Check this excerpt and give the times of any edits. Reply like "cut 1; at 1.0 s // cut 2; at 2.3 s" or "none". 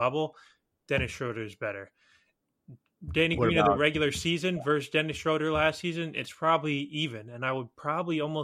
none